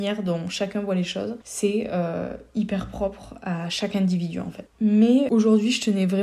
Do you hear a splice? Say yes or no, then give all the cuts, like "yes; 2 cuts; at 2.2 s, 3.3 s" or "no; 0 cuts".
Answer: no; 0 cuts